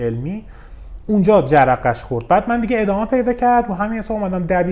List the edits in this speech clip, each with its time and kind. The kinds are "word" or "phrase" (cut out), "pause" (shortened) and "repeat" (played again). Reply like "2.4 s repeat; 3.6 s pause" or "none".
none